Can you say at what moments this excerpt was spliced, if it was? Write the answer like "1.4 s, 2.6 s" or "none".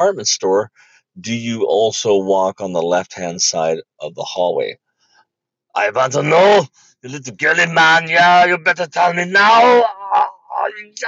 none